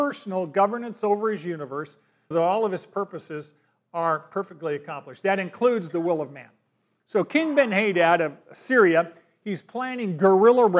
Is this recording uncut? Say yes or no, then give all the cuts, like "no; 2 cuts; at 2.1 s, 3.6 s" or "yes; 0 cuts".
no; 1 cut; at 2.3 s